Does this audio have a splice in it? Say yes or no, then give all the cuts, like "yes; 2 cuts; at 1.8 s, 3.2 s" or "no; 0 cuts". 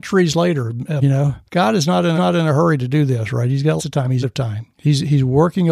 yes; 6 cuts; at 1.0 s, 1.5 s, 2.2 s, 3.8 s, 4.2 s, 4.7 s